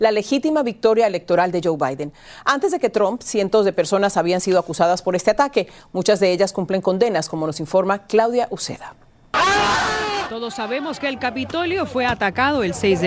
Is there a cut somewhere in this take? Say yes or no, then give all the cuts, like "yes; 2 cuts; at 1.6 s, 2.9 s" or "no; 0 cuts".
no; 0 cuts